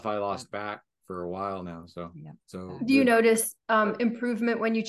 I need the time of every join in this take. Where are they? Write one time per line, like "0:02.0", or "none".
0:02.4